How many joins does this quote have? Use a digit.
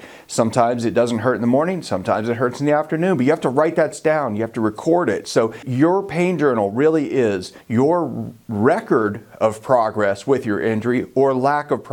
1